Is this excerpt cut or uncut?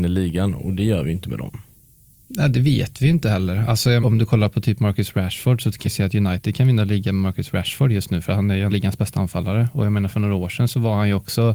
cut